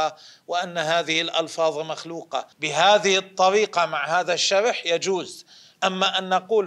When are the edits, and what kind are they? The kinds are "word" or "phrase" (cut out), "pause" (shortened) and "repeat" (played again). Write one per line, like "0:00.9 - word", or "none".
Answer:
0:02.5 - pause